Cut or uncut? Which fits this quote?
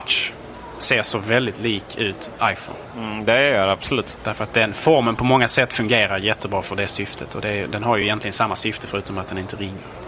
uncut